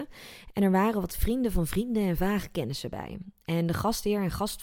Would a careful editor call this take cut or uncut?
uncut